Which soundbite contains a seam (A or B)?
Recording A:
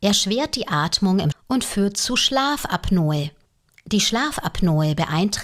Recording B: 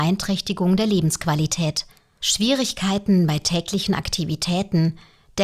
A